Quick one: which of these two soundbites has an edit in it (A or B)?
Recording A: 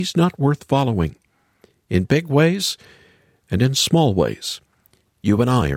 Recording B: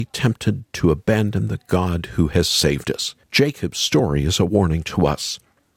B